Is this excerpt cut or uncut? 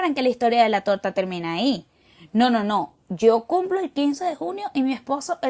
uncut